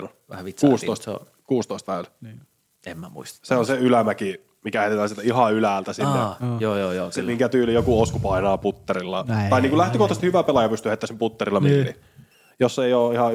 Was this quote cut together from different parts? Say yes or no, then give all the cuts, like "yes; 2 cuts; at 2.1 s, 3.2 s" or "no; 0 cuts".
no; 0 cuts